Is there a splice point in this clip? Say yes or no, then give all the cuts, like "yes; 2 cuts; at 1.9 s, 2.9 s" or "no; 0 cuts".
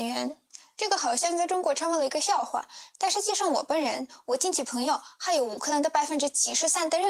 yes; 1 cut; at 4.2 s